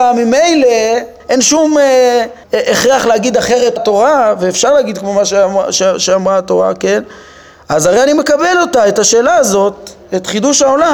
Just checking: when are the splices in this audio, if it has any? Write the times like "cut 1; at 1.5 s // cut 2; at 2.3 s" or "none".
cut 1; at 1.2 s // cut 2; at 2.4 s // cut 3; at 3.8 s

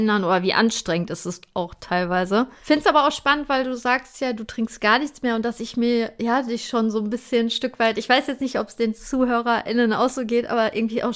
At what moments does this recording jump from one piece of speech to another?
none

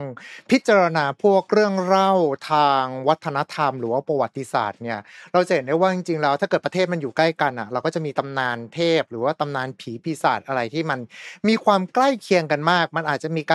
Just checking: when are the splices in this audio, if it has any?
none

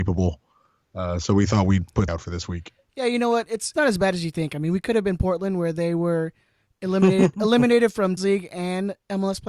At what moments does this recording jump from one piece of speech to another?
cut 1; at 2.1 s // cut 2; at 3.7 s // cut 3; at 8.2 s

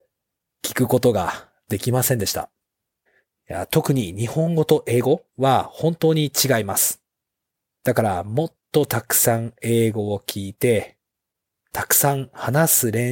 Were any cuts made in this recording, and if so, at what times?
cut 1; at 3.1 s // cut 2; at 5.3 s // cut 3; at 7.3 s

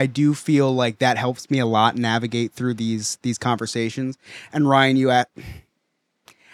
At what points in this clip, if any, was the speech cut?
none

